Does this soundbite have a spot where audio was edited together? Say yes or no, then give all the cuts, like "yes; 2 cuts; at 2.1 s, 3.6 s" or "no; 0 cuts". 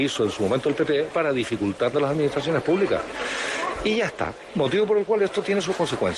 yes; 2 cuts; at 1.1 s, 1.9 s